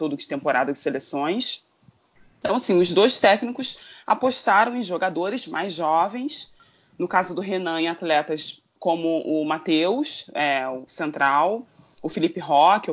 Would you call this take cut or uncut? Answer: uncut